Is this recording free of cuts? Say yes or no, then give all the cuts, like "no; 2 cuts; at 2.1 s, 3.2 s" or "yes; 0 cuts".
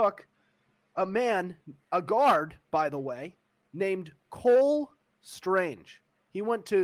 yes; 0 cuts